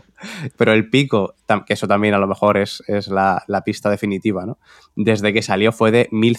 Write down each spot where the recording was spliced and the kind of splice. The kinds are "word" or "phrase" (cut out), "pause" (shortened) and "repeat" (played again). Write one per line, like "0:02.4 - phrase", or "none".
none